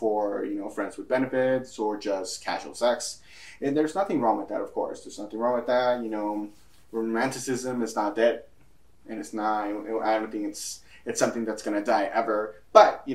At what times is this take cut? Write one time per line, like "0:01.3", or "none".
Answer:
none

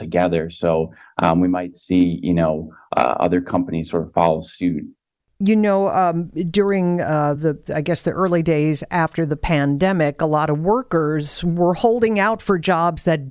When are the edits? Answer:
none

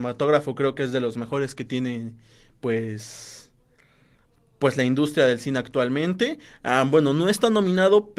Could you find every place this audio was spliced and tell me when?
none

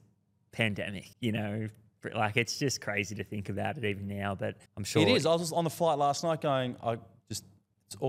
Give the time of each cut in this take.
0:01.1
0:04.7

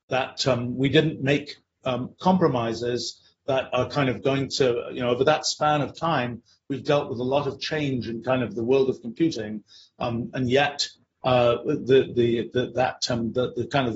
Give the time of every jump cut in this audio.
none

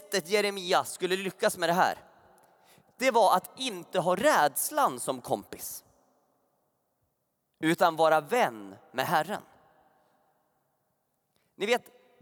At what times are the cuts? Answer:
none

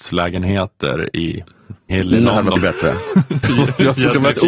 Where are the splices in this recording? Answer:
0:01.9
0:02.6
0:03.4

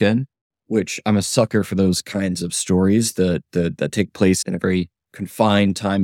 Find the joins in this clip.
none

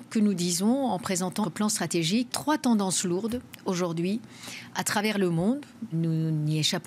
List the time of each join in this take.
0:01.4
0:02.3
0:05.9

